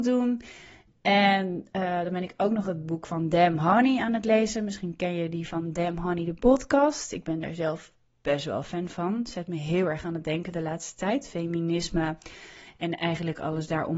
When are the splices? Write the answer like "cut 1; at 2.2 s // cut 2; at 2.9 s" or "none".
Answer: none